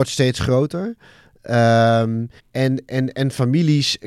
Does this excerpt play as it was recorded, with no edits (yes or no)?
no